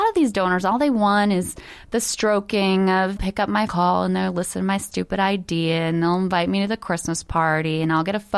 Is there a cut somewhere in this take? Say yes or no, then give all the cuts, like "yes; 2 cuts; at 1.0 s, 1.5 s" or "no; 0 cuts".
yes; 2 cuts; at 3.2 s, 3.7 s